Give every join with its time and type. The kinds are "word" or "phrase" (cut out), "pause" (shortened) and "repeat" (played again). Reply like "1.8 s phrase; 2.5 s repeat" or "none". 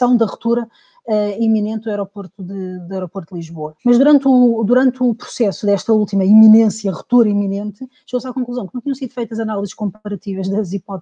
3.8 s pause

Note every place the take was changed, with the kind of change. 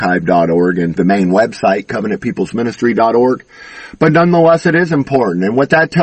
1.0 s word

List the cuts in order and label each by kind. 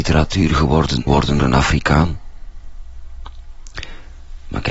1.1 s word; 1.4 s word

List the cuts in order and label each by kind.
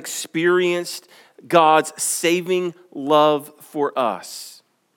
none

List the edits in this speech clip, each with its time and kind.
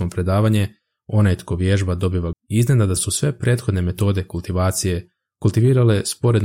2.3 s word; 3.0 s phrase

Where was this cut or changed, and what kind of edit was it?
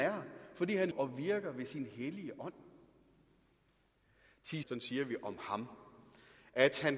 0.9 s word; 4.6 s phrase

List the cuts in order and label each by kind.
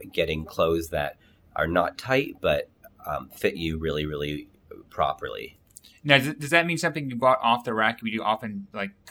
none

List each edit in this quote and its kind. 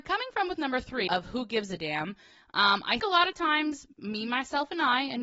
1.1 s word; 3.0 s word

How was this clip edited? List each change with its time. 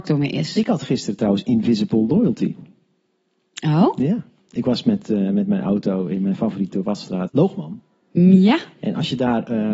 7.3 s phrase

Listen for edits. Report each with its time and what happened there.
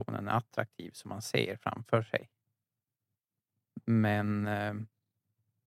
none

